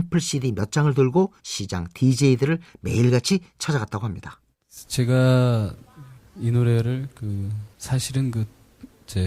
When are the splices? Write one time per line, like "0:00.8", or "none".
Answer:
0:01.4
0:04.5
0:07.7